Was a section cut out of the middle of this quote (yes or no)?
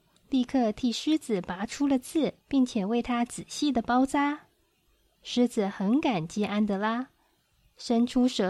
yes